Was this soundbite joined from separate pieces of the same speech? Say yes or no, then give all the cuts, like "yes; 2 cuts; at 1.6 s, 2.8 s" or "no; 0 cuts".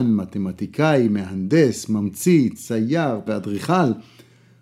yes; 1 cut; at 3.3 s